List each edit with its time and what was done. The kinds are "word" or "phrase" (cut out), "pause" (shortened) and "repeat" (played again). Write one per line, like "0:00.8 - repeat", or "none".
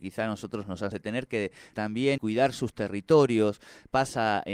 0:00.9 - phrase
0:01.7 - word
0:02.2 - word